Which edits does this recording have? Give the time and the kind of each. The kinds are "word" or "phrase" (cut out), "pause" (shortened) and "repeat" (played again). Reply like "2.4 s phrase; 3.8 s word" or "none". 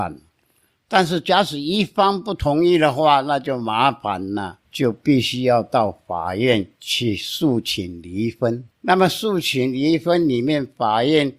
4.6 s pause; 6.8 s pause; 8.7 s pause

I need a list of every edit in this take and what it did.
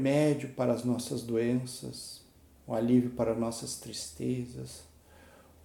none

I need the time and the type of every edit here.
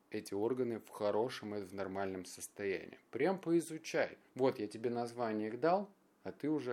4.3 s pause

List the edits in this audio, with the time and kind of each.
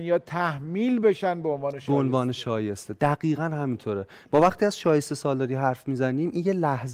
none

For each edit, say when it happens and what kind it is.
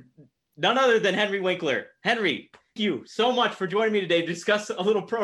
2.8 s word

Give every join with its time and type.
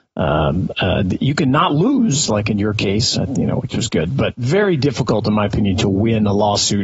none

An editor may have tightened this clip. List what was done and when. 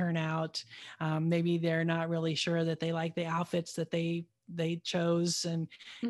none

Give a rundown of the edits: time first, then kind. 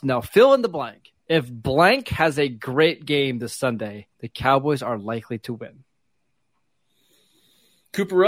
1.2 s pause; 4.1 s pause

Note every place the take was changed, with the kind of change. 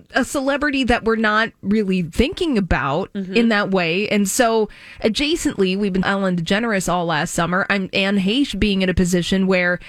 6.0 s phrase

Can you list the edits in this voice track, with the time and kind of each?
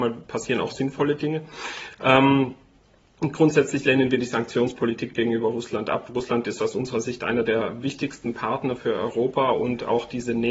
none

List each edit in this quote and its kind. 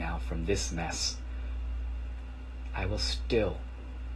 none

